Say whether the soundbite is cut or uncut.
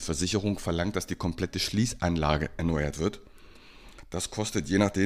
uncut